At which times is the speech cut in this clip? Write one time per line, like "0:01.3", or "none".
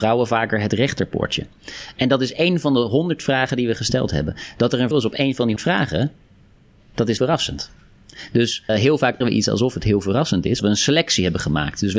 0:04.9
0:05.6
0:07.2
0:08.7
0:09.2
0:10.6

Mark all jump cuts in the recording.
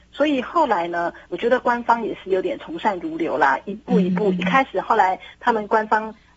0:01.3

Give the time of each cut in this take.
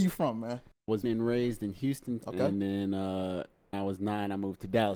0:01.0
0:02.2
0:03.7

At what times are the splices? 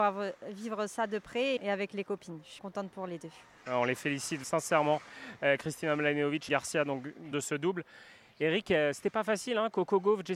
0:01.6
0:02.6
0:04.4
0:06.5
0:07.3

